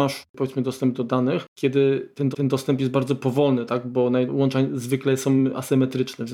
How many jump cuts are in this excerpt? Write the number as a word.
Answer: two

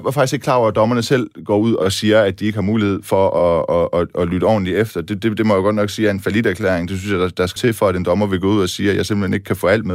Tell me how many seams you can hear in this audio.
one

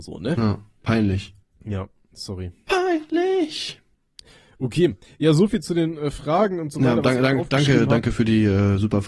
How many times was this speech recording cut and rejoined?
zero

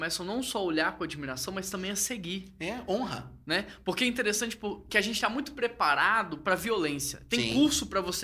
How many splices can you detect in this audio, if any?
zero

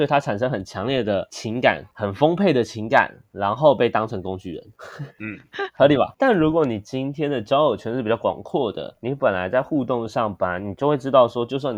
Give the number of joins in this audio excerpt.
zero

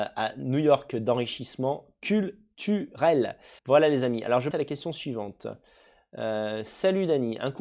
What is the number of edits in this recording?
two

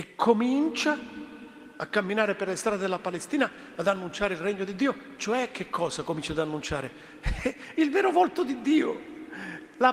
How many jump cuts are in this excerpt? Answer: zero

